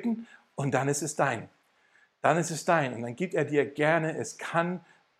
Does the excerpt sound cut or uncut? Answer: uncut